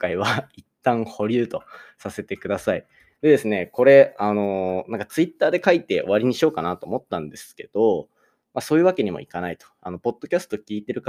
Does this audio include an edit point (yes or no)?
no